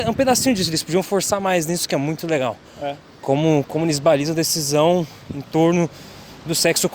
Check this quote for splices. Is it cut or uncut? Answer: cut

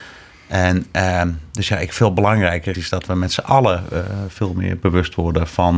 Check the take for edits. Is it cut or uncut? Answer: cut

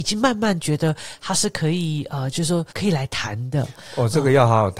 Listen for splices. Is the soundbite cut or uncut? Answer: cut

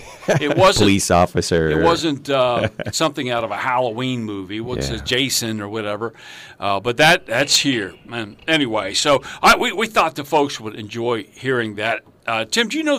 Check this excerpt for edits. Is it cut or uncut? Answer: uncut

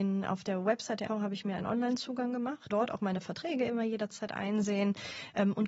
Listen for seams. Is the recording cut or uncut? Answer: cut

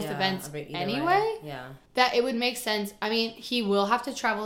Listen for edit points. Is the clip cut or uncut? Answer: cut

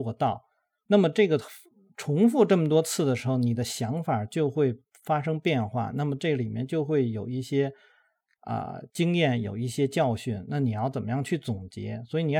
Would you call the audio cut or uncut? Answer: uncut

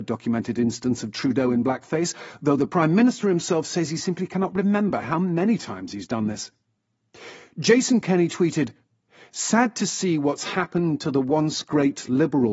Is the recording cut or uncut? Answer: uncut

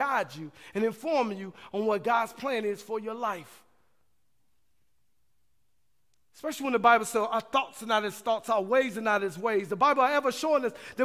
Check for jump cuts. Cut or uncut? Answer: uncut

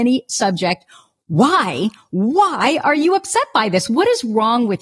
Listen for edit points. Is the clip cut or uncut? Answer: uncut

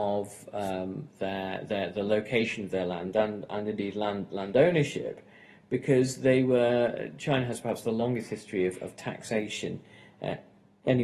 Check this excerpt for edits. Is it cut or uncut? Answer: uncut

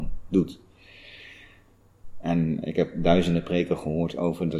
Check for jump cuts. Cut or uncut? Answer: uncut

